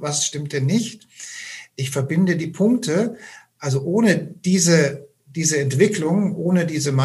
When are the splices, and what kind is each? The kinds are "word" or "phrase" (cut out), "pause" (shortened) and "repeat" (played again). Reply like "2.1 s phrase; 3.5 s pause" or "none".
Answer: none